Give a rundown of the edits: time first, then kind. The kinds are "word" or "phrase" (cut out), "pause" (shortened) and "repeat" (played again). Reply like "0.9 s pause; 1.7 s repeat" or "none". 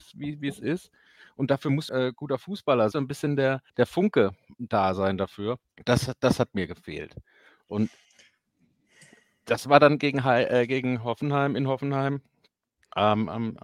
1.9 s phrase; 2.9 s phrase; 3.7 s pause; 5.7 s pause

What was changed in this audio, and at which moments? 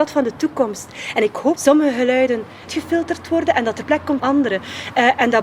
1.6 s phrase; 2.7 s word; 3.8 s word; 4.2 s word

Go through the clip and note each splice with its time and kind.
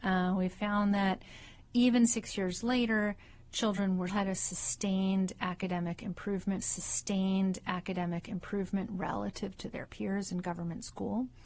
1.7 s pause; 4.1 s word; 6.6 s repeat

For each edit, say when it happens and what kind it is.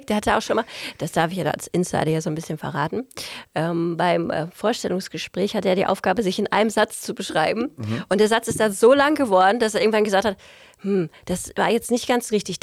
none

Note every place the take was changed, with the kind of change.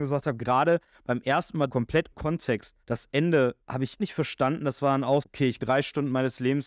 1.7 s word; 2.1 s word; 2.8 s pause; 3.6 s pause; 4.0 s word; 5.2 s word; 5.6 s phrase

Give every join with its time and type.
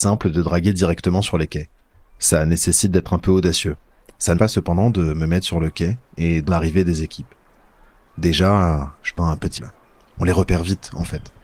4.4 s word; 6.5 s word; 9.2 s word; 9.6 s word

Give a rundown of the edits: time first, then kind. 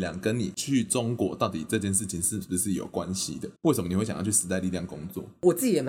3.6 s pause

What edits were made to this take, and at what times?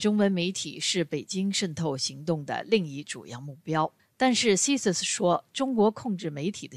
4.0 s pause

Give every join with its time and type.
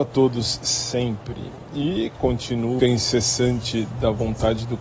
2.8 s phrase

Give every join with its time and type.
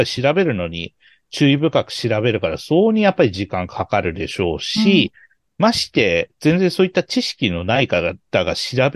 none

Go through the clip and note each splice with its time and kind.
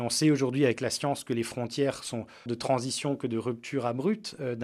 2.5 s phrase

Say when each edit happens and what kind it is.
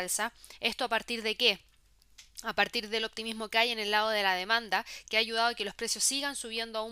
none

